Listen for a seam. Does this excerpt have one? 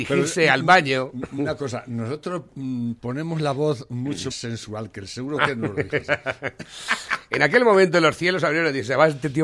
yes; 2 cuts; at 3.0 s, 4.3 s

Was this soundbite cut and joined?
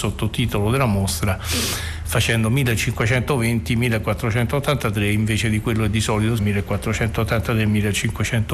yes; 1 cut; at 6.4 s

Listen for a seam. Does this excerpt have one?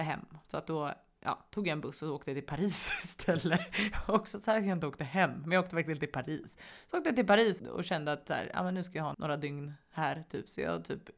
yes; 2 cuts; at 7.6 s, 9.1 s

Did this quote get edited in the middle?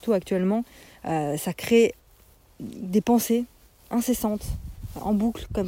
no; 0 cuts

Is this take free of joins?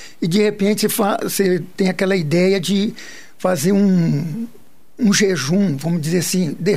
yes; 0 cuts

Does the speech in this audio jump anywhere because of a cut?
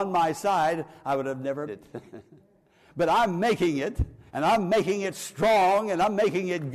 yes; 2 cuts; at 1.7 s, 4.3 s

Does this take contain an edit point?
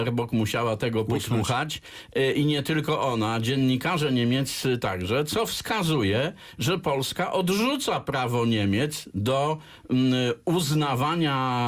no; 0 cuts

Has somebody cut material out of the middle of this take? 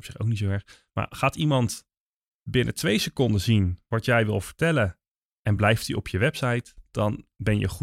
no; 0 cuts

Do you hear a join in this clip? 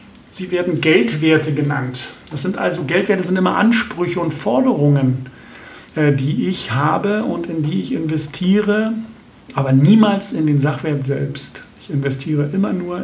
yes; 2 cuts; at 5.9 s, 9.2 s

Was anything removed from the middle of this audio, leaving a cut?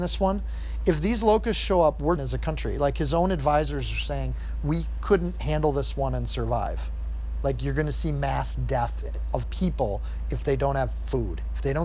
yes; 2 cuts; at 2.2 s, 9.4 s

